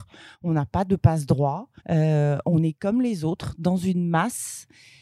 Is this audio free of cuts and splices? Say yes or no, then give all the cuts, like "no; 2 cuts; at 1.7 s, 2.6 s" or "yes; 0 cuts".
no; 1 cut; at 1.8 s